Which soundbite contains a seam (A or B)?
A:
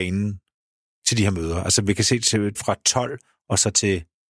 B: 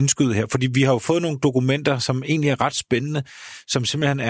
A